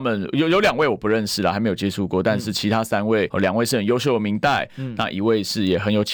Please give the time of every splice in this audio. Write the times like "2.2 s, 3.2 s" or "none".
3.3 s